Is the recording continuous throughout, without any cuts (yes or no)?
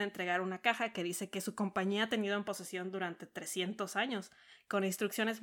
yes